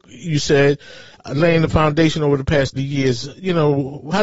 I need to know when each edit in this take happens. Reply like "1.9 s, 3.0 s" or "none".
2.8 s